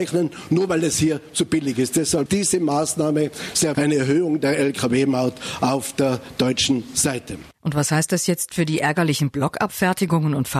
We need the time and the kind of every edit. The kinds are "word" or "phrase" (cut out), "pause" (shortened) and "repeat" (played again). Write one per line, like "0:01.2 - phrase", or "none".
0:02.3 - word
0:03.7 - word
0:07.5 - pause